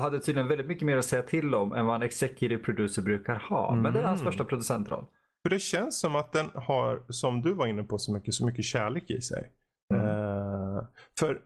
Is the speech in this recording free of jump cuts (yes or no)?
yes